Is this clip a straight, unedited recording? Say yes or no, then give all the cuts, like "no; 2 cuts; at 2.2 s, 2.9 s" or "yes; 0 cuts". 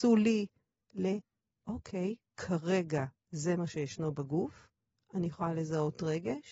yes; 0 cuts